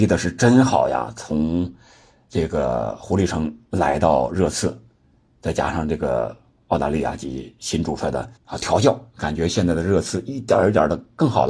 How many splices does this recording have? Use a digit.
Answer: 2